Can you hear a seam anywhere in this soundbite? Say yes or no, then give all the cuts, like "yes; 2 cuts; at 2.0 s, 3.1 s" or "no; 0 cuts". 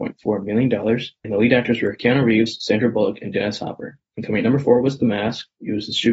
no; 0 cuts